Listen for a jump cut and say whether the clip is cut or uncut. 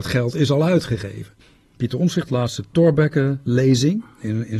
cut